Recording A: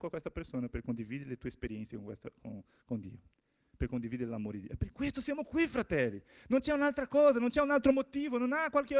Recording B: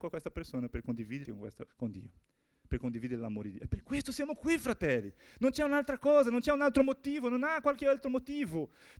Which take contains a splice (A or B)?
B